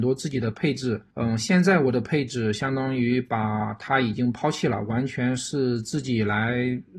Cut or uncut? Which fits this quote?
cut